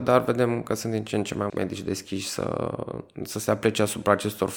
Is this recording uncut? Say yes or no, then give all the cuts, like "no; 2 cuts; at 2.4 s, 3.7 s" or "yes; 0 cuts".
no; 1 cut; at 1.5 s